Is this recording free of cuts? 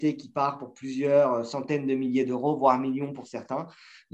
yes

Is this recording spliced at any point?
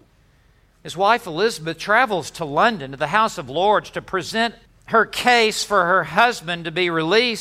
yes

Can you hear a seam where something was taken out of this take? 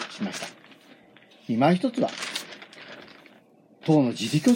no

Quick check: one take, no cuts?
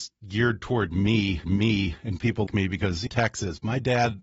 no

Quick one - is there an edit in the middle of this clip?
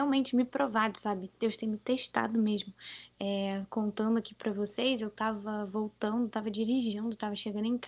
no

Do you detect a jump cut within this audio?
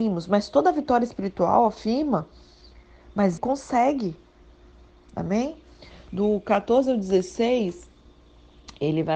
yes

